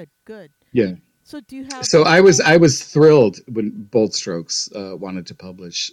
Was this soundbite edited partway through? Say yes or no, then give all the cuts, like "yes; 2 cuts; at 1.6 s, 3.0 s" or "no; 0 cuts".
no; 0 cuts